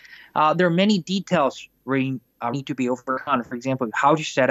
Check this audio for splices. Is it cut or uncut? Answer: cut